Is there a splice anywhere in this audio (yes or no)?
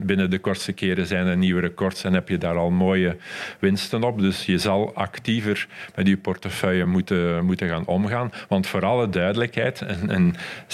no